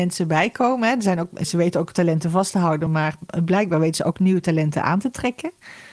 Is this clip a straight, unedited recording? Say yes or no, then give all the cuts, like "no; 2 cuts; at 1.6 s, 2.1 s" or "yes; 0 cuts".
yes; 0 cuts